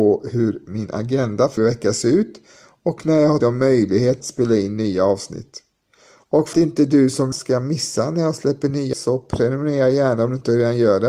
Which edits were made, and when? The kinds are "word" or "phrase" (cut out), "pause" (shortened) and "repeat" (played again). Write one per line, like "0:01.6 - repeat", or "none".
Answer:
0:01.6 - word
0:03.4 - word
0:04.2 - word
0:06.5 - word
0:07.3 - word
0:08.9 - word